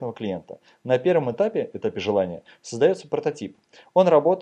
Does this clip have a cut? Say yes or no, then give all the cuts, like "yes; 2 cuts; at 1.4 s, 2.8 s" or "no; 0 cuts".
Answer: no; 0 cuts